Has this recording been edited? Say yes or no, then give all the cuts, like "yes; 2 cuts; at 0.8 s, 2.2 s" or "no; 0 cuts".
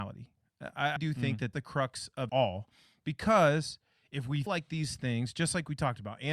yes; 4 cuts; at 1.0 s, 1.5 s, 2.3 s, 4.5 s